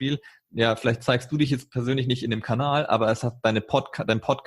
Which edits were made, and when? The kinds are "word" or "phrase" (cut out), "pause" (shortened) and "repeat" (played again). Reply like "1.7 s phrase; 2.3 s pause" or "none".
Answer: none